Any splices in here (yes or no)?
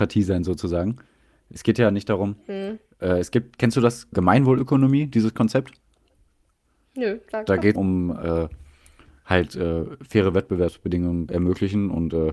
yes